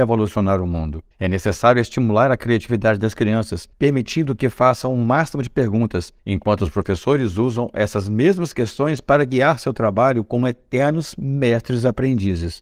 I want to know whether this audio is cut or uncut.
cut